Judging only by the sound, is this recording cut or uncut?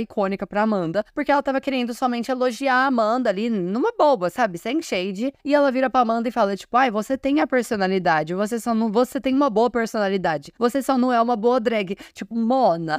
cut